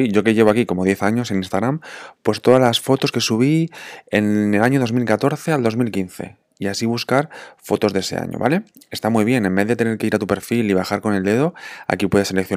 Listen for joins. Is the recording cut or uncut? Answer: uncut